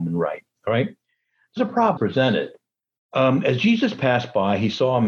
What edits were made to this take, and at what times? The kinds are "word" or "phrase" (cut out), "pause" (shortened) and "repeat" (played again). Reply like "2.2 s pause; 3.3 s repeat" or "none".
1.6 s word; 2.0 s word